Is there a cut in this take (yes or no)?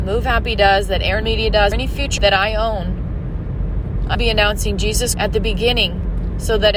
yes